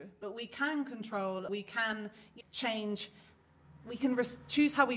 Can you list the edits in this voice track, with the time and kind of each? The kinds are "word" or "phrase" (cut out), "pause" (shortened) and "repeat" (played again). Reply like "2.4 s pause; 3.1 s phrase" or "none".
1.5 s word; 2.4 s word